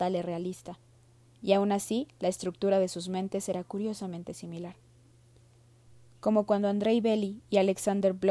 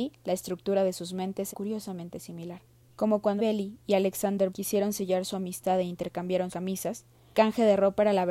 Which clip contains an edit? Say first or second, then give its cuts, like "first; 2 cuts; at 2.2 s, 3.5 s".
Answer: second; 6 cuts; at 1.5 s, 2.9 s, 3.4 s, 4.5 s, 6.5 s, 7.3 s